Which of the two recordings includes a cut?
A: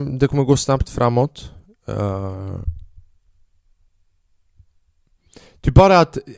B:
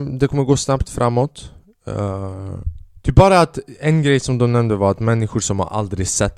B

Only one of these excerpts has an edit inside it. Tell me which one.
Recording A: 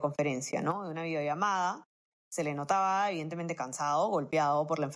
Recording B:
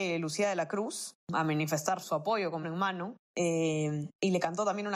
B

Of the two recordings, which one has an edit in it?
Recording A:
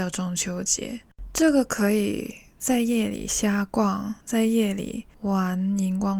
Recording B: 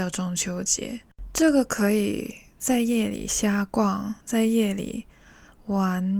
A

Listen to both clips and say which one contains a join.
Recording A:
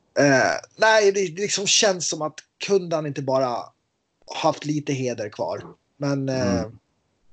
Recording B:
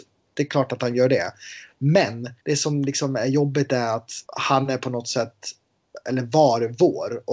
B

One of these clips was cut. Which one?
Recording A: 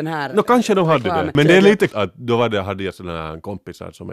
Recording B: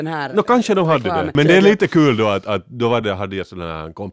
A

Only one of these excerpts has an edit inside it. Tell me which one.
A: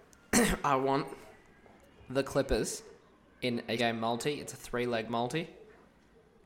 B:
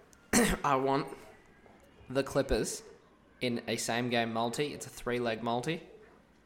A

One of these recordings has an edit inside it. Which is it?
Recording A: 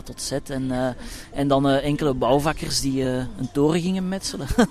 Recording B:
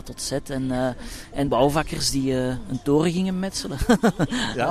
B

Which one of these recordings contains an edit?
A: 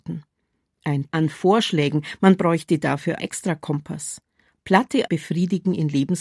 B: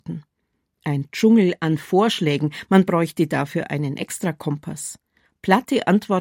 A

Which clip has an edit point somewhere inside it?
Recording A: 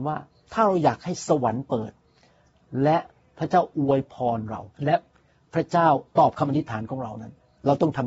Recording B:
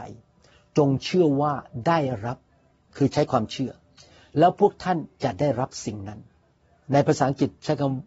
A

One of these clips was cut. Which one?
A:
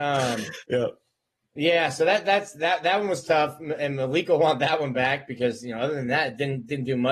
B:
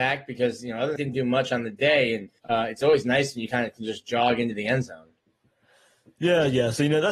B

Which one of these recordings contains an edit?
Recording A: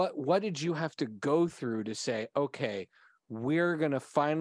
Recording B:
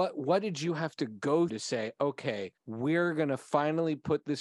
B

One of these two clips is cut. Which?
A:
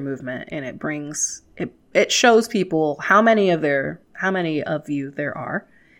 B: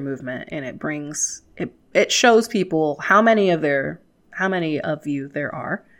A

